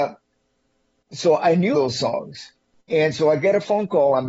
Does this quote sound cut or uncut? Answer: cut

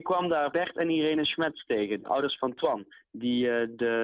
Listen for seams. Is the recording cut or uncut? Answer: uncut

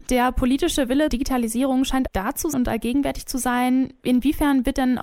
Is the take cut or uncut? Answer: cut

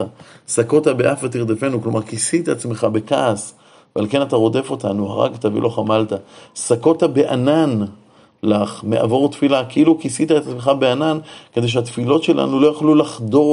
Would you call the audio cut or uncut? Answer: uncut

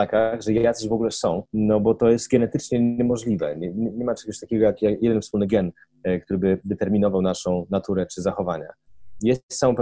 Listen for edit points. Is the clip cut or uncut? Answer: cut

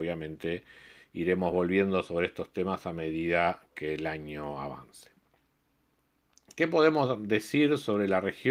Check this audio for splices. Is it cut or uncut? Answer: uncut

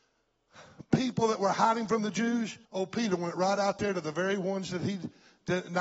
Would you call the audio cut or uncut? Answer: cut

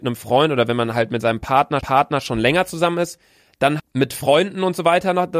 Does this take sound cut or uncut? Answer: cut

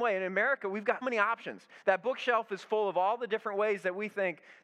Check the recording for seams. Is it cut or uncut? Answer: cut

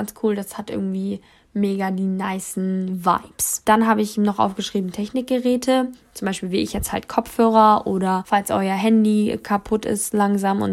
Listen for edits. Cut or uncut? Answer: uncut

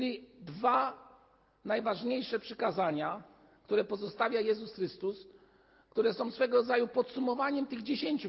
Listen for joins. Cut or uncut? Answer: uncut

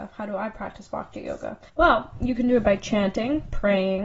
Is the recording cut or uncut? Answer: cut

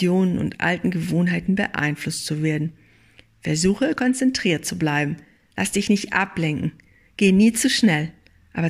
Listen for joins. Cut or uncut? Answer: uncut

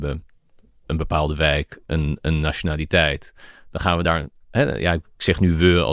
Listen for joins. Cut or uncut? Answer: uncut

